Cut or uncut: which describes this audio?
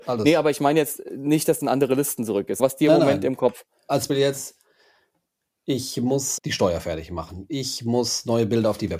cut